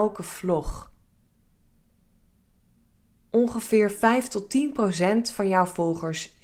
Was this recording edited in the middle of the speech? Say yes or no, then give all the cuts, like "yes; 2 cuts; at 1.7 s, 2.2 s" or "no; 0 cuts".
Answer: no; 0 cuts